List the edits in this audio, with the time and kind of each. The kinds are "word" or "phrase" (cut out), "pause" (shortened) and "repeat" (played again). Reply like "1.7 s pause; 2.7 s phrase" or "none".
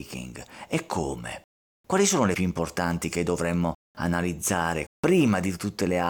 1.7 s pause; 2.3 s word; 4.9 s word